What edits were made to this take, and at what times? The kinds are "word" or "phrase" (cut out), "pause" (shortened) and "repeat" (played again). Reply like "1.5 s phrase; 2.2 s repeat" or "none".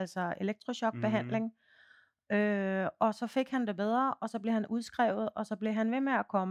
none